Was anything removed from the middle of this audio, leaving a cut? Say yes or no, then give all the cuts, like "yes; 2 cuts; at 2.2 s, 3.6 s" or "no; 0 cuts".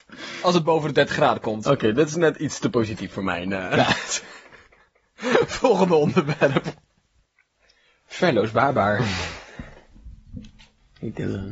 no; 0 cuts